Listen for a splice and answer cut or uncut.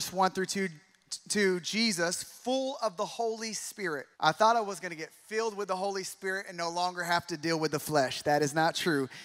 cut